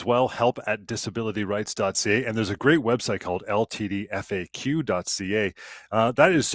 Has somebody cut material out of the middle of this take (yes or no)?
no